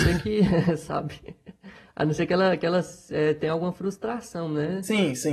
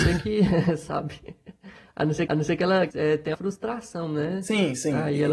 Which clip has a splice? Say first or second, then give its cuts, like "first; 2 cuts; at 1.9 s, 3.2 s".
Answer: second; 3 cuts; at 2.3 s, 2.9 s, 3.3 s